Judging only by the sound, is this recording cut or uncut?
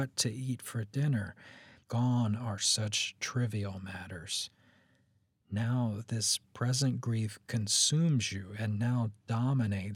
uncut